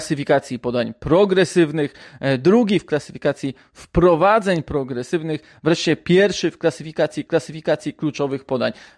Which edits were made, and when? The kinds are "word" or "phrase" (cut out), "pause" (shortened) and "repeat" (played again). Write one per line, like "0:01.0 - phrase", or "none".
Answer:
0:07.3 - repeat